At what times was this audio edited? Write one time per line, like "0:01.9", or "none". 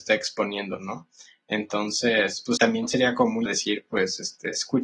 0:02.6
0:03.5